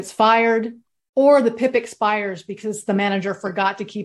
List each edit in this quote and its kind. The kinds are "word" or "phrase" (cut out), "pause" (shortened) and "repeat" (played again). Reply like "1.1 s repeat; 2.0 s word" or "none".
none